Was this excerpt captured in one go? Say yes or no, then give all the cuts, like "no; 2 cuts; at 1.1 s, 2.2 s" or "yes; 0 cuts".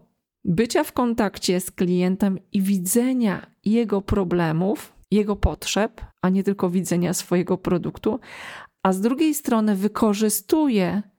no; 2 cuts; at 5.0 s, 6.1 s